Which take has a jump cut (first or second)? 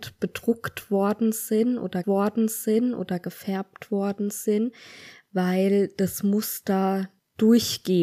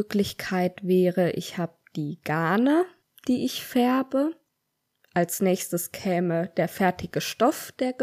first